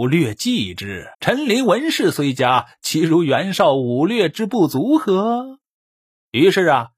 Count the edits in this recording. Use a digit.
1